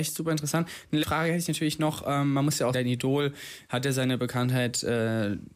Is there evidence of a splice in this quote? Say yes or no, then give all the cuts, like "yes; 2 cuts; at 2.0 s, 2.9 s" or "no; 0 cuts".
yes; 2 cuts; at 1.0 s, 2.7 s